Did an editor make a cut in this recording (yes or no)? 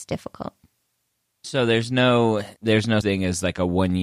yes